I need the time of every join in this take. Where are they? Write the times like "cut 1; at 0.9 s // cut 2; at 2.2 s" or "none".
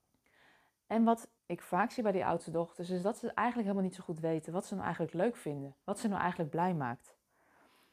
cut 1; at 1.4 s // cut 2; at 5.8 s